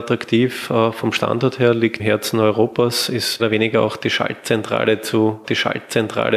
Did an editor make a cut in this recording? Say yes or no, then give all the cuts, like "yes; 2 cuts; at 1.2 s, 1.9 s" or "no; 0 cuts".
yes; 3 cuts; at 2.0 s, 3.4 s, 5.4 s